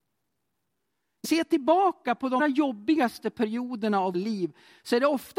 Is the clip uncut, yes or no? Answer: no